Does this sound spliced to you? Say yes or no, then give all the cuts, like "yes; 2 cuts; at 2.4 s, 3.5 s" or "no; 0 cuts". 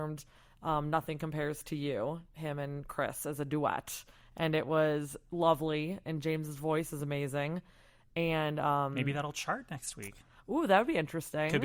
no; 0 cuts